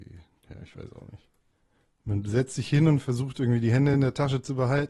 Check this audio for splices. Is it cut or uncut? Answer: uncut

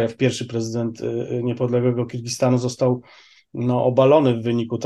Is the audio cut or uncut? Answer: uncut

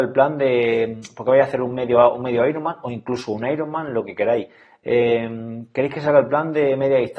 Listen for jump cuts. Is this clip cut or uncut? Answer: uncut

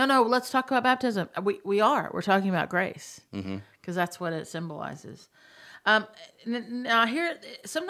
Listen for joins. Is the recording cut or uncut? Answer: uncut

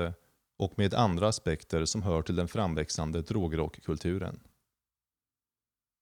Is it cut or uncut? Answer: uncut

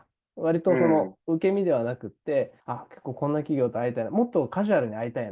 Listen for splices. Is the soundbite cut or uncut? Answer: cut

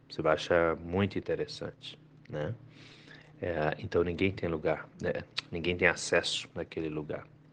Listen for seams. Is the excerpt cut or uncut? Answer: uncut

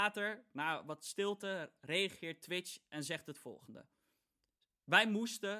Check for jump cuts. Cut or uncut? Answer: uncut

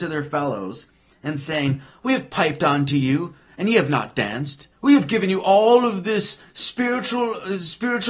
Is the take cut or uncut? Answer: cut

